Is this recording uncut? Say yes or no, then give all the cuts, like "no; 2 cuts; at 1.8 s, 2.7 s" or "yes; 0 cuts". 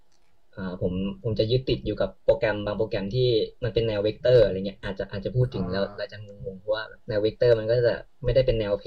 no; 2 cuts; at 3.6 s, 7.0 s